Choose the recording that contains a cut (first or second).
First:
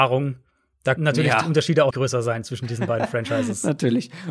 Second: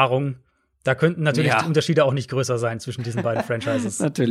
first